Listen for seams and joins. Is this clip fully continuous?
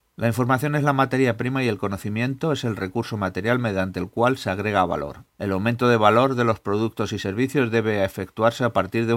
no; 1 cut; at 5.3 s

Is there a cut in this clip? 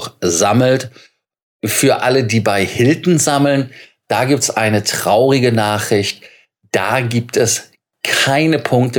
no; 0 cuts

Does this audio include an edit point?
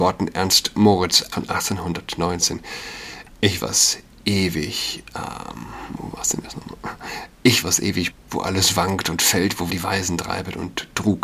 yes; 6 cuts; at 1.3 s, 3.6 s, 6.0 s, 7.6 s, 8.1 s, 9.7 s

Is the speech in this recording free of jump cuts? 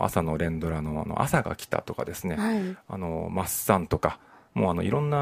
yes; 0 cuts

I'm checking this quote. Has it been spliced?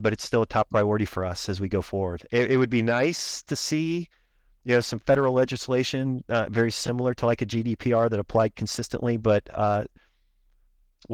no; 0 cuts

